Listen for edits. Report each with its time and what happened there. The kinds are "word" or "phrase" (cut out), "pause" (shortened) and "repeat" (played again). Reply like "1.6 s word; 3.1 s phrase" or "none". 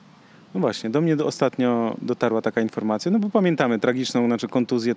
none